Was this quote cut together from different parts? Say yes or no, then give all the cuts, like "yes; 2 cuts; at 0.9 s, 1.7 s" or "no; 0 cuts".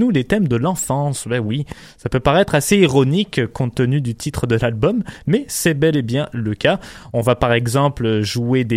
no; 0 cuts